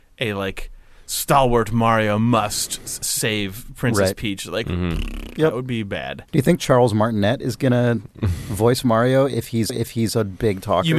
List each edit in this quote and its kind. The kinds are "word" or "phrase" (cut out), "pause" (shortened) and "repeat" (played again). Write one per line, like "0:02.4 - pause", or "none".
0:03.0 - word
0:06.3 - pause
0:09.7 - repeat